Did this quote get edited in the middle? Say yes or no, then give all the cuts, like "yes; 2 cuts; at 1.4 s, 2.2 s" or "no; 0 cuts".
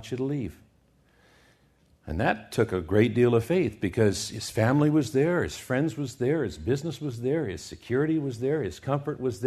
no; 0 cuts